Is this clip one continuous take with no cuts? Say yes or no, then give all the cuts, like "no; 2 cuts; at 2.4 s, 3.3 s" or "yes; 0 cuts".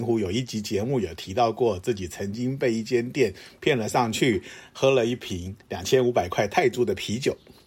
no; 1 cut; at 5.6 s